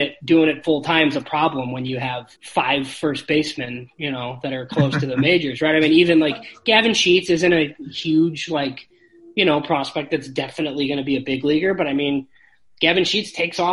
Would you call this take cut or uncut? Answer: cut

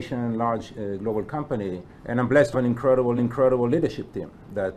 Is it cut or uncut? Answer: cut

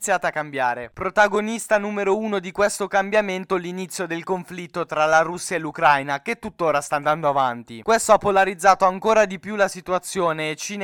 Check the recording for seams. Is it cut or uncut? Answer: uncut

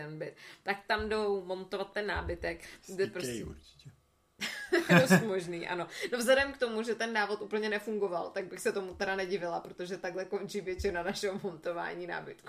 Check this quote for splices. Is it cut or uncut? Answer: uncut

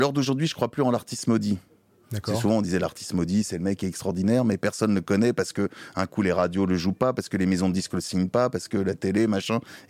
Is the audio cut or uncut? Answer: uncut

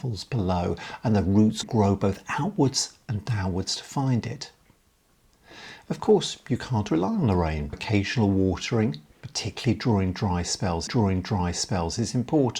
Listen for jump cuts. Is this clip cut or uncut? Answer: cut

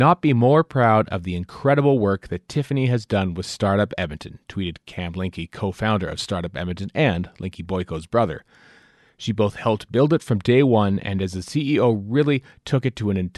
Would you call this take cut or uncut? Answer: uncut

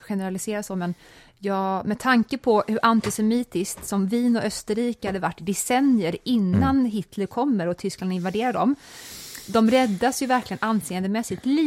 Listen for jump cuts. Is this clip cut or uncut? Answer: uncut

